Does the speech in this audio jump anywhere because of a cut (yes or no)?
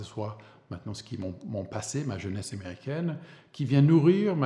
no